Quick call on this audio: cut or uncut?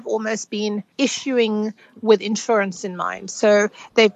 cut